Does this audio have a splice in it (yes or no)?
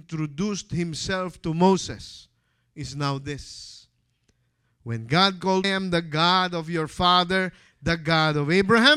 yes